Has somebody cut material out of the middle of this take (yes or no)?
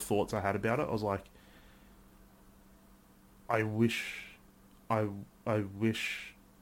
no